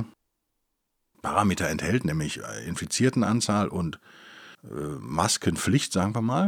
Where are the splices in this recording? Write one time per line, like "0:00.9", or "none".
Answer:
0:04.5